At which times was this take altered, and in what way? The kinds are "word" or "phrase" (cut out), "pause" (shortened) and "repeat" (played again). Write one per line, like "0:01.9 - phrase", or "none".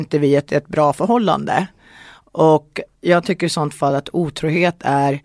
none